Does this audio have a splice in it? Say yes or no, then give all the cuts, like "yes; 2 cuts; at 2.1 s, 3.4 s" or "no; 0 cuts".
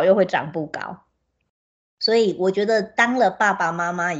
no; 0 cuts